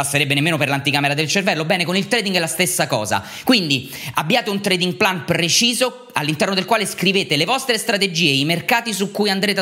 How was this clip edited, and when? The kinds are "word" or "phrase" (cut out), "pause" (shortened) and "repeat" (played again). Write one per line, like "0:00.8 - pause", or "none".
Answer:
none